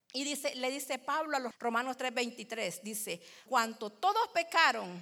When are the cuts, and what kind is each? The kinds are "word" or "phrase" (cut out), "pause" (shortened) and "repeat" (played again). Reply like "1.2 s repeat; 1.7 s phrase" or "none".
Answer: 1.5 s word; 3.5 s word

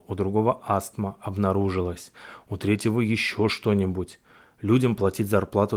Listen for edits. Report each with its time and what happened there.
none

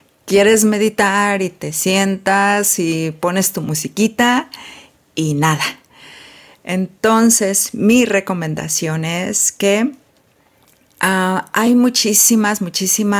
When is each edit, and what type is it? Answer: none

